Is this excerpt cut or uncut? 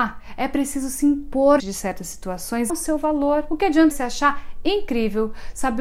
cut